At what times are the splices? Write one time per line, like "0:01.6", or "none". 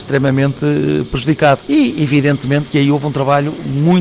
none